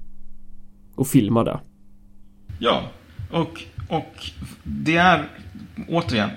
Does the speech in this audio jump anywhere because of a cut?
no; 0 cuts

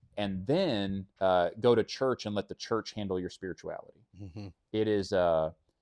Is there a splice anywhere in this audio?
yes; 2 cuts; at 1.1 s, 4.1 s

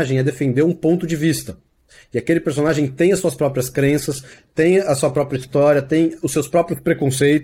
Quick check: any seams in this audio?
no; 0 cuts

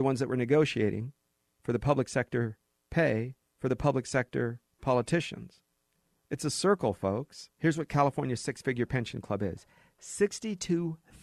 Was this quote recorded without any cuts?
no; 2 cuts; at 3.4 s, 7.5 s

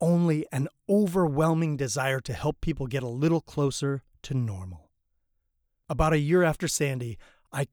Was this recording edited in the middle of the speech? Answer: no; 0 cuts

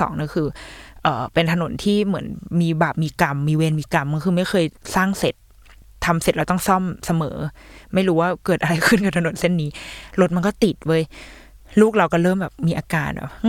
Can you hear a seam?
no; 0 cuts

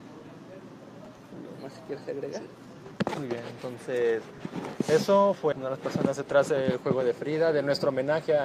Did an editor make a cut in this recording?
yes; 1 cut; at 5.5 s

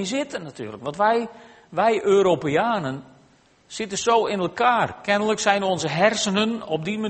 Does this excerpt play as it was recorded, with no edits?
yes; 0 cuts

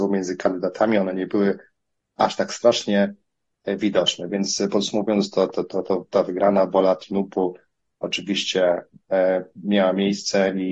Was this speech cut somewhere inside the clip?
no; 0 cuts

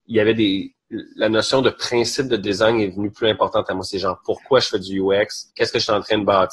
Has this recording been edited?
yes; 1 cut; at 5.5 s

